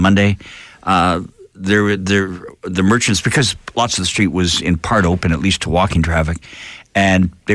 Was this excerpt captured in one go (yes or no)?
yes